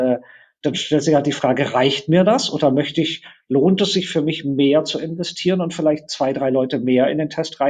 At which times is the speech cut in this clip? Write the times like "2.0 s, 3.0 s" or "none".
none